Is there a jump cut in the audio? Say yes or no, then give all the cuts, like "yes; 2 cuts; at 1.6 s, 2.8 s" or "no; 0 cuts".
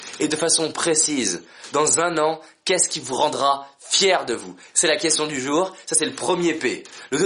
no; 0 cuts